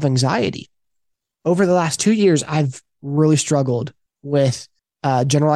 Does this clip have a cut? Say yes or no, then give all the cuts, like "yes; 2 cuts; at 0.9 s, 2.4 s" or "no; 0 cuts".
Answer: no; 0 cuts